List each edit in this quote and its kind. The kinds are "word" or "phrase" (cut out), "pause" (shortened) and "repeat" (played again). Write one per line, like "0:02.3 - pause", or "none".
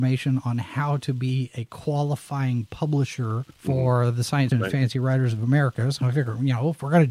0:03.5 - pause
0:04.5 - word